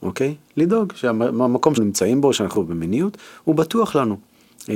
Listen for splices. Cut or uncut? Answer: cut